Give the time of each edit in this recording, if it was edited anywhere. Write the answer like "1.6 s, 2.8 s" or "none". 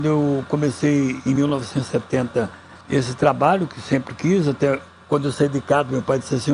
2.8 s

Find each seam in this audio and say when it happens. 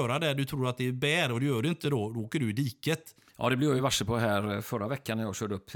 none

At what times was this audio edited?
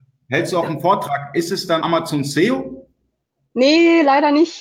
1.8 s

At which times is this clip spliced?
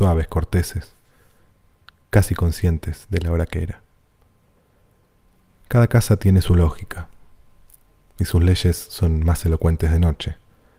none

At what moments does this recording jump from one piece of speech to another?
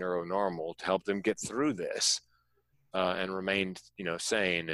none

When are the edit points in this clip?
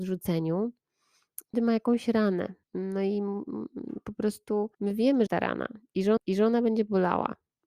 1.5 s, 2.6 s, 4.7 s, 5.3 s, 6.2 s

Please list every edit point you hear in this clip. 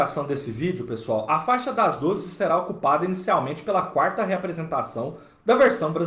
none

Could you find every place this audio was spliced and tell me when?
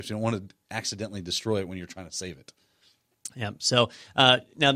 none

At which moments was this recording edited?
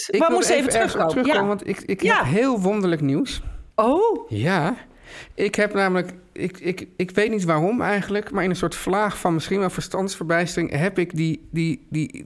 3.7 s

